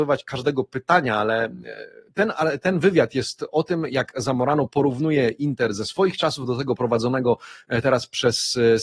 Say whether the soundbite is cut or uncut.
uncut